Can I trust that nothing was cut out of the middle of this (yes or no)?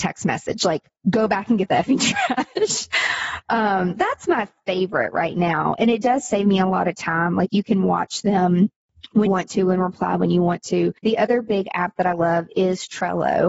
no